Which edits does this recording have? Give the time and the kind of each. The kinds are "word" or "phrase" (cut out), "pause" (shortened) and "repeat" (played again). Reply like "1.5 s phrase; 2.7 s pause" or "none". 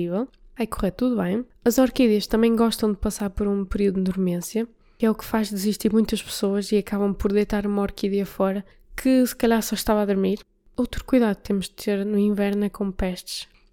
none